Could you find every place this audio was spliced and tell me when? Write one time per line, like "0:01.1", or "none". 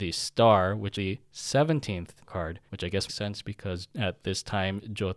0:00.9
0:02.2
0:02.7
0:03.1
0:03.9